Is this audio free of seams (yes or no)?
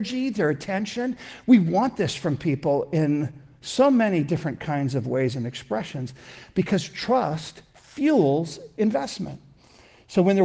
yes